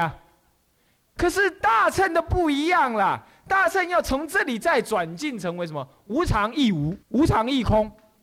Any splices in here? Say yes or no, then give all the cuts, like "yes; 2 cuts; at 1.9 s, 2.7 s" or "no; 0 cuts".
yes; 1 cut; at 7.0 s